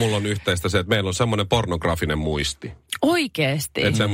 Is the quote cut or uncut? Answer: uncut